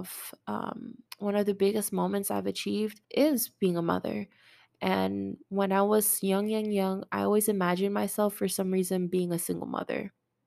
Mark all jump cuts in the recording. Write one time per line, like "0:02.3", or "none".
0:01.1
0:03.0